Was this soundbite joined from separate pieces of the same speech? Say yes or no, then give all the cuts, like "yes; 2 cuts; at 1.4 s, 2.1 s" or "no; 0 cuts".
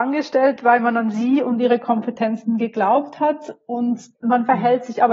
yes; 1 cut; at 4.1 s